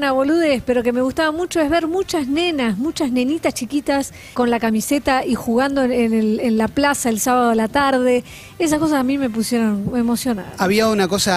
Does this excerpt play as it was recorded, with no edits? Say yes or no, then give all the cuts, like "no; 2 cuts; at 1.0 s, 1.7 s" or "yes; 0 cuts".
no; 1 cut; at 4.3 s